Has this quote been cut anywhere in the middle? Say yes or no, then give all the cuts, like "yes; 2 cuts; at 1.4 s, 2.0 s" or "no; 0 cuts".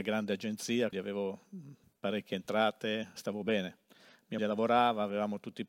yes; 3 cuts; at 0.9 s, 3.2 s, 4.4 s